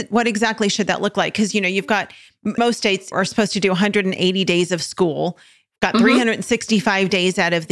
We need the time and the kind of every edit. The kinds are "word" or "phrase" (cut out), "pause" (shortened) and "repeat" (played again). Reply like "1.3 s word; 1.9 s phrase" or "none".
2.6 s word; 3.1 s word